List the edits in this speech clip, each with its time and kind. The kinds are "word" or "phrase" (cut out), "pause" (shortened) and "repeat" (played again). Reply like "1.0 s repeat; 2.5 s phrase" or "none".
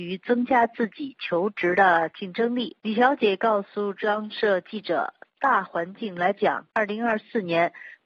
2.8 s pause; 6.7 s pause